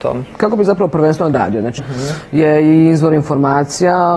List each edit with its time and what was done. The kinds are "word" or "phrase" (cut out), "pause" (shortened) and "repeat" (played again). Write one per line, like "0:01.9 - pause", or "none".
0:01.3 - word
0:01.8 - word